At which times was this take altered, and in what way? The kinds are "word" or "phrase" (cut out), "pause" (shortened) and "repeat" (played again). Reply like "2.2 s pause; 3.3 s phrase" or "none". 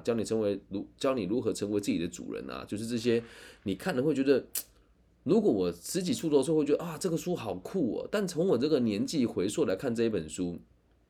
none